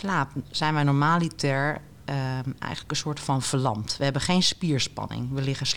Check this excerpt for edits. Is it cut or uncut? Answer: uncut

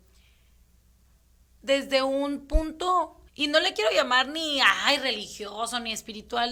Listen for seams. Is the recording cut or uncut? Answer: cut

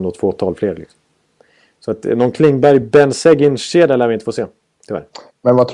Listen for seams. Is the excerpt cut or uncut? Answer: uncut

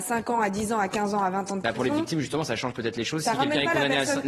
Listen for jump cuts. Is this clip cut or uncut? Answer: uncut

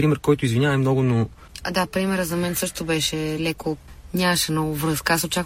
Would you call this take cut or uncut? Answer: uncut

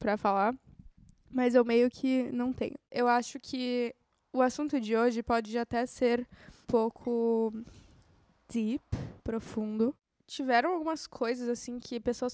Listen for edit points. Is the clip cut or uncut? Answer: cut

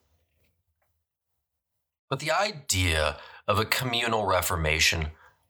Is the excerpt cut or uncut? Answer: uncut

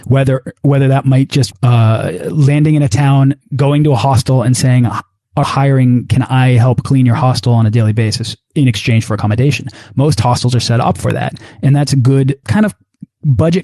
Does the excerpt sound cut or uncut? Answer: cut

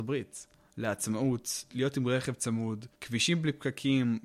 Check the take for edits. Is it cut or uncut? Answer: cut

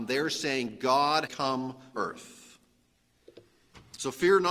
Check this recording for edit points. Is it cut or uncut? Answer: cut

